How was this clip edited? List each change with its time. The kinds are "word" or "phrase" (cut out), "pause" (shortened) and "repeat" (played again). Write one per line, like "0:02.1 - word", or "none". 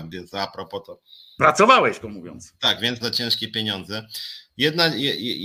0:02.0 - word
0:03.0 - word